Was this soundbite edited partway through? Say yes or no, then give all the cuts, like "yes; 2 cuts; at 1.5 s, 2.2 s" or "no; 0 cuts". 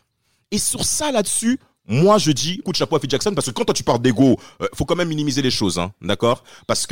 yes; 1 cut; at 2.6 s